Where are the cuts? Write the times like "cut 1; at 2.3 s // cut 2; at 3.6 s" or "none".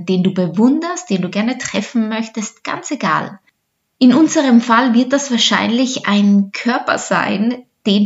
none